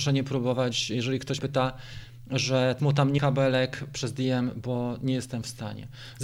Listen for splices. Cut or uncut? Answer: cut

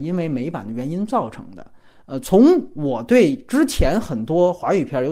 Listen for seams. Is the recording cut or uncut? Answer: uncut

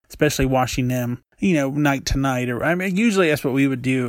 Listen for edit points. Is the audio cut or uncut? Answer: cut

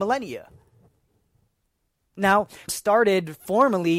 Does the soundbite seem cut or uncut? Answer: cut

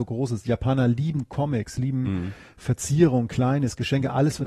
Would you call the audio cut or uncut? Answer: uncut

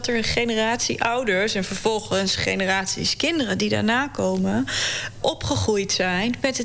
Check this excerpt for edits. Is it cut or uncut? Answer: cut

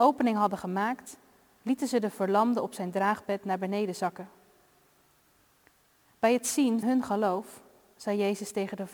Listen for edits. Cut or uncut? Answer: cut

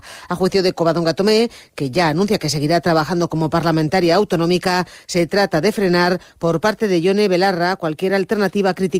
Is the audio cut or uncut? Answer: uncut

